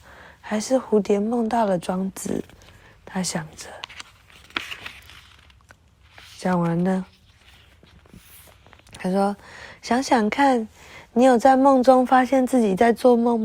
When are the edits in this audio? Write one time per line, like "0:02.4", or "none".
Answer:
none